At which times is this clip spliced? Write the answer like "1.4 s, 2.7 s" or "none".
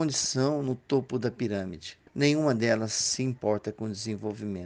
2.1 s